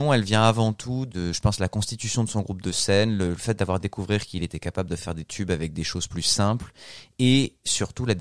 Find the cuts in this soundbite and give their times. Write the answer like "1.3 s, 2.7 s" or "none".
none